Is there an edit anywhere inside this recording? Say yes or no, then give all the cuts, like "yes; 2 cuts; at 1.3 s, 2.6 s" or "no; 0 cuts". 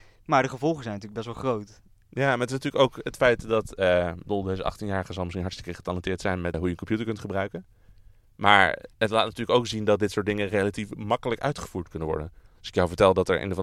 yes; 3 cuts; at 6.5 s, 8.9 s, 12.5 s